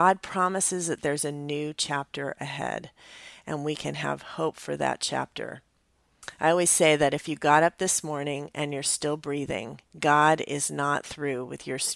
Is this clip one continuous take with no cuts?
no; 1 cut; at 9.9 s

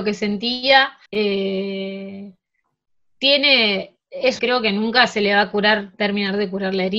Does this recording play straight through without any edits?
no; 2 cuts; at 1.1 s, 4.4 s

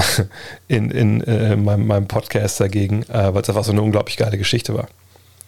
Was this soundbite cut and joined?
no; 0 cuts

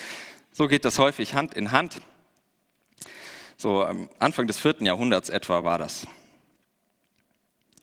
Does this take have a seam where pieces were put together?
no; 0 cuts

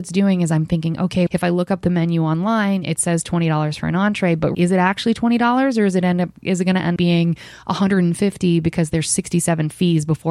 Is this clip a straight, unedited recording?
no; 3 cuts; at 1.3 s, 4.5 s, 7.0 s

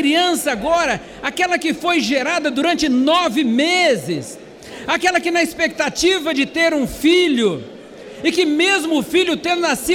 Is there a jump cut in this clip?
no; 0 cuts

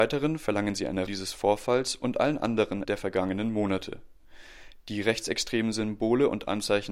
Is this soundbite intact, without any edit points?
no; 2 cuts; at 1.1 s, 2.8 s

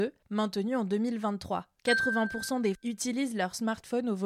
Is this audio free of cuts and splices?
no; 1 cut; at 2.7 s

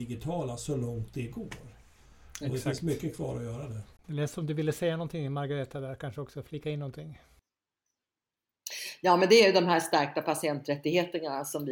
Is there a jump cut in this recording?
yes; 1 cut; at 4.0 s

